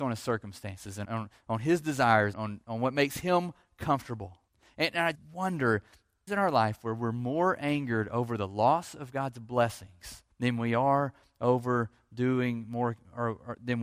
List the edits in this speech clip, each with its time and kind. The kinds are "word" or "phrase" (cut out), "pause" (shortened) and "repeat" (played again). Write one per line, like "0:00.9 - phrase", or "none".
0:01.0 - word
0:02.3 - word
0:04.5 - pause
0:05.1 - word
0:06.3 - phrase
0:10.3 - pause